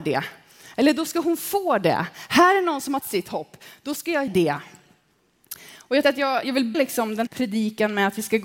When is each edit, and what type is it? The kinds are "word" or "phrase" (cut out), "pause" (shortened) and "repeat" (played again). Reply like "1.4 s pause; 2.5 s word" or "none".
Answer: 3.0 s word; 4.3 s word; 6.0 s word; 6.4 s word; 6.7 s word; 7.3 s word